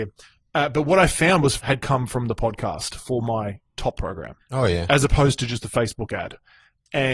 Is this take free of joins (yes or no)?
no